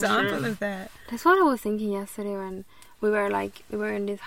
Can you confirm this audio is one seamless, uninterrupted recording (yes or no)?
yes